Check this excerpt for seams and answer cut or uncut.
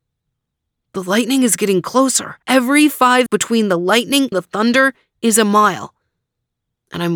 cut